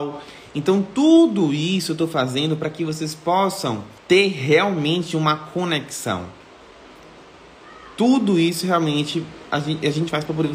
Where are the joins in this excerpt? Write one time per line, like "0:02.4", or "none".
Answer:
0:04.0